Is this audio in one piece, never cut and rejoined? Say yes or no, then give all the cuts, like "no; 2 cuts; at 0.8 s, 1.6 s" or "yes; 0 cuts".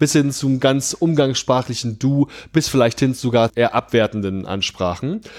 no; 1 cut; at 3.5 s